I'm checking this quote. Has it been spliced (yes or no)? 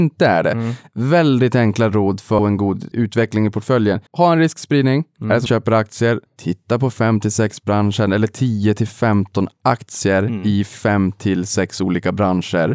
yes